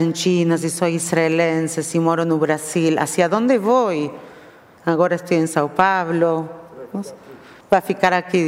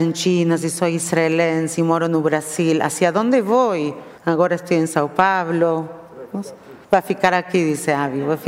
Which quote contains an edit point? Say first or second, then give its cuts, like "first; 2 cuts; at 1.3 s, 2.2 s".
second; 3 cuts; at 1.7 s, 4.2 s, 6.8 s